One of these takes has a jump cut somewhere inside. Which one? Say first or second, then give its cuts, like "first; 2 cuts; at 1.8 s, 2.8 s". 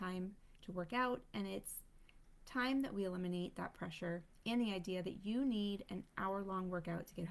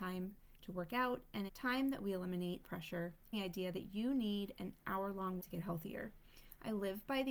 second; 4 cuts; at 1.5 s, 2.6 s, 3.3 s, 5.4 s